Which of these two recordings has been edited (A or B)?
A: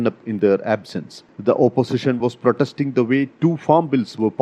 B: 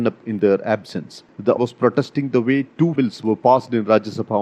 B